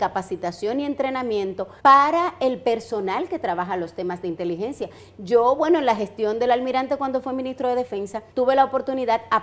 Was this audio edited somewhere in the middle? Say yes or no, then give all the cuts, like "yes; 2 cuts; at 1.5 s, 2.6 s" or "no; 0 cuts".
yes; 2 cuts; at 1.8 s, 8.3 s